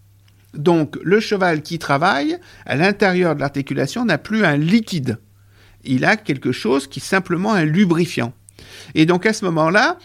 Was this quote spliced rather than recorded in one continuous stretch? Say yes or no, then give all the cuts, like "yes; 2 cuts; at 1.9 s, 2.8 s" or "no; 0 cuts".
no; 0 cuts